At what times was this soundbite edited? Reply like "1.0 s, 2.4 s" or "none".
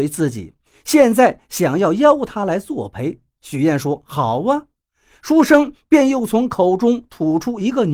none